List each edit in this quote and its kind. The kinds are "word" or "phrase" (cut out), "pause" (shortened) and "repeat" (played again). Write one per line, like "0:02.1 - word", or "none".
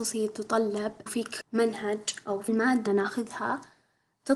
0:01.1 - word
0:01.4 - word
0:02.5 - word
0:02.9 - word